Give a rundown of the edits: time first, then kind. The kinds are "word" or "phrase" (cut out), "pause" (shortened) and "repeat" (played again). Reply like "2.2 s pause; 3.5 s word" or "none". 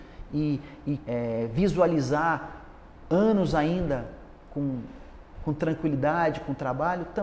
1.0 s word